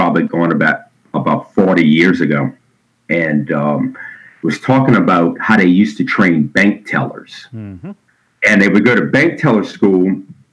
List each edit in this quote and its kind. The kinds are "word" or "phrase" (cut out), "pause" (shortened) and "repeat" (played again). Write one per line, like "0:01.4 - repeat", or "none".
none